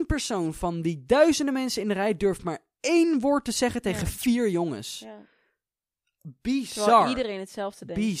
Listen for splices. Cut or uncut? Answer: uncut